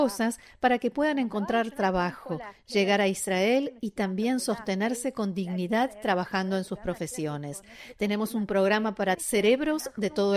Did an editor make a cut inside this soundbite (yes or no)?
yes